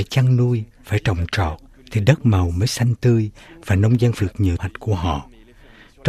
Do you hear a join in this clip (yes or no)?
yes